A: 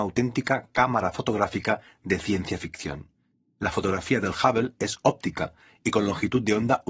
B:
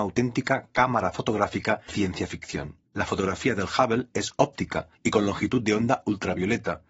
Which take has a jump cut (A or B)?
B